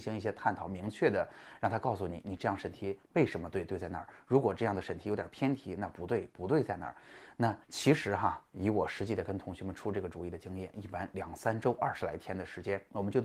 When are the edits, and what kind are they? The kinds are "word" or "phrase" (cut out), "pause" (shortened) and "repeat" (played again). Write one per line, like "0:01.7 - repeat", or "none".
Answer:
0:07.6 - pause